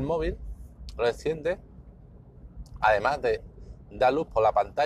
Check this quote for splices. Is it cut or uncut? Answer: uncut